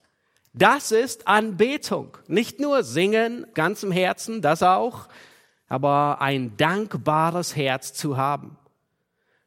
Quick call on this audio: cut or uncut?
cut